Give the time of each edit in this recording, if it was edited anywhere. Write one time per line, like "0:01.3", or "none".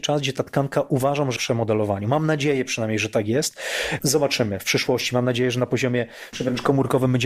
0:01.4
0:06.3